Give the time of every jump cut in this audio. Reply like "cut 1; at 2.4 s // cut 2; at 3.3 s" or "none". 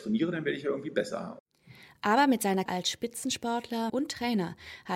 cut 1; at 2.7 s // cut 2; at 3.9 s

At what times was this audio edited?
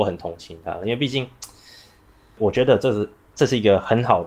none

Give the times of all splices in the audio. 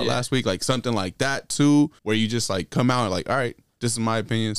cut 1; at 2.0 s

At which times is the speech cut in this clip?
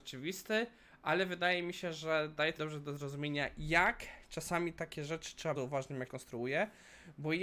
cut 1; at 2.6 s // cut 2; at 5.6 s // cut 3; at 6.1 s

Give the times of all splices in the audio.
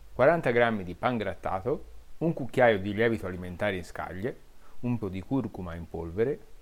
cut 1; at 5.0 s

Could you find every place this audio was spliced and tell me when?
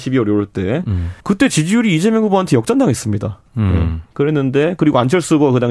cut 1; at 1.2 s // cut 2; at 3.5 s

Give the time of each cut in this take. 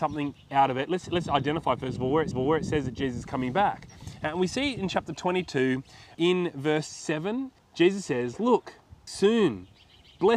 cut 1; at 2.3 s // cut 2; at 6.1 s // cut 3; at 7.6 s // cut 4; at 9.1 s

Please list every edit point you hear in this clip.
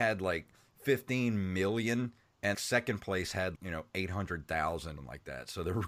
cut 1; at 2.5 s // cut 2; at 3.6 s // cut 3; at 5.0 s

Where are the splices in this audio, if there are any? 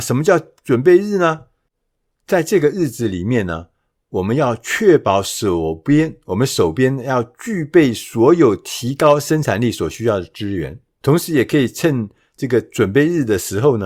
none

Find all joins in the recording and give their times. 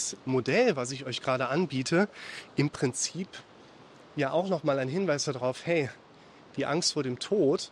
none

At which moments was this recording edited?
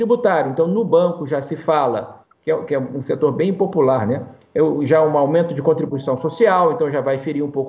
none

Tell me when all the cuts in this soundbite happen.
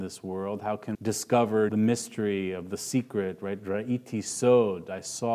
cut 1; at 0.9 s // cut 2; at 1.7 s

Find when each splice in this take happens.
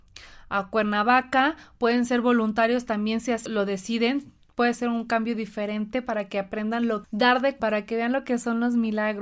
cut 1; at 3.5 s // cut 2; at 7.0 s // cut 3; at 7.6 s

